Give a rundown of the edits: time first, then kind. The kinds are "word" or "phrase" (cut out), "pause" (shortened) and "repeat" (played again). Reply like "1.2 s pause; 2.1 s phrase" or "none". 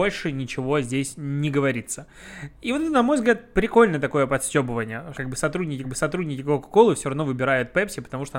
5.1 s word; 5.8 s repeat